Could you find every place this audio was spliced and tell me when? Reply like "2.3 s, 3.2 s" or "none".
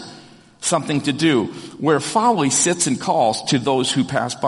none